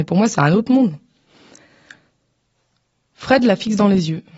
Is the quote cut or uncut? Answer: uncut